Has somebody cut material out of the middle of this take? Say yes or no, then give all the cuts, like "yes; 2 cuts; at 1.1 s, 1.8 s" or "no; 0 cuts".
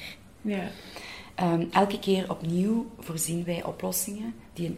no; 0 cuts